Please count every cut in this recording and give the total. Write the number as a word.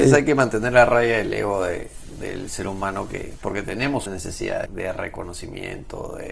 two